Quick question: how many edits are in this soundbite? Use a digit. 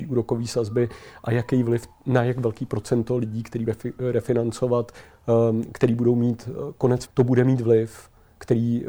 2